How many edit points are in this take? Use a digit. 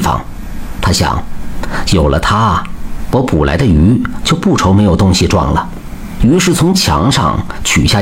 1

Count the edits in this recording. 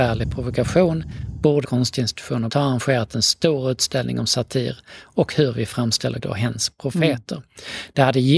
3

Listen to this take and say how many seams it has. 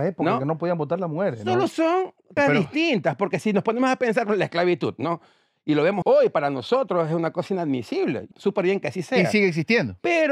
3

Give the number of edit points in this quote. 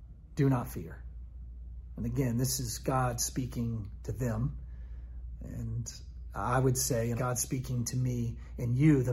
1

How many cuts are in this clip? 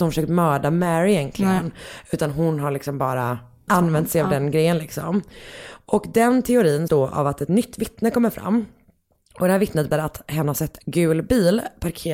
5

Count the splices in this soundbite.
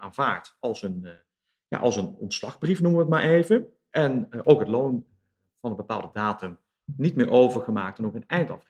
0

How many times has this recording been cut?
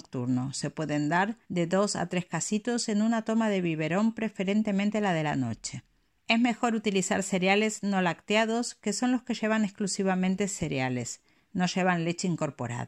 2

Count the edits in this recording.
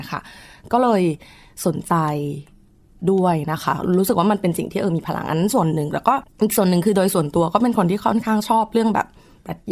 1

